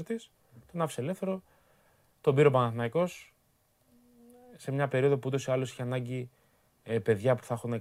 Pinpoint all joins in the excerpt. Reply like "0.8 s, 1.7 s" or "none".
none